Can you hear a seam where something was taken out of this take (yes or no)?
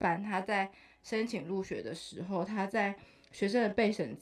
no